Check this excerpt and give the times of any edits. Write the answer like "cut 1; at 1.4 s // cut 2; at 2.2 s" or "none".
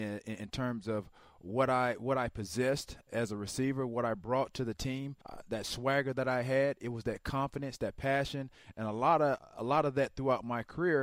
cut 1; at 5.2 s